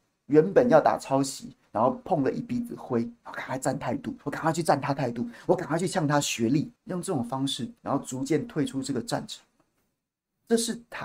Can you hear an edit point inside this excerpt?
yes; 3 cuts; at 4.2 s, 6.8 s, 7.8 s

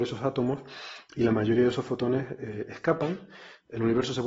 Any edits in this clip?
no; 0 cuts

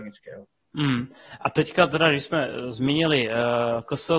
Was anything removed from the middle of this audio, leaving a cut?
no; 0 cuts

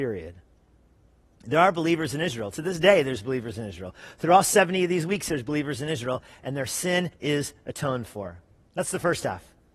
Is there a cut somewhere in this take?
yes; 1 cut; at 7.1 s

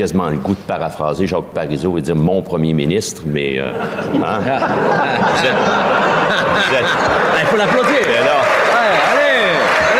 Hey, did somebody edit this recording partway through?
no; 0 cuts

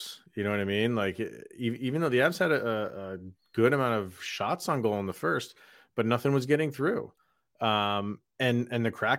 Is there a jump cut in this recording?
no; 0 cuts

